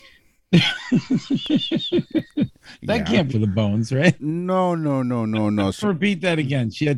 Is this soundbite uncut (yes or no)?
no